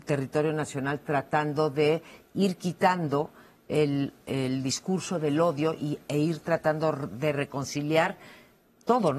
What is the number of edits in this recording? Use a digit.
0